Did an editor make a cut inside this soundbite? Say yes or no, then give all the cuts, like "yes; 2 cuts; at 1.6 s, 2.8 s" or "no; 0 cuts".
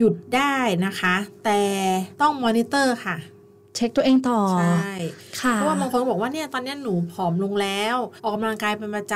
yes; 2 cuts; at 2.1 s, 8.2 s